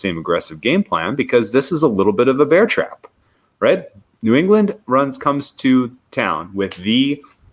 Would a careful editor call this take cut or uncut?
uncut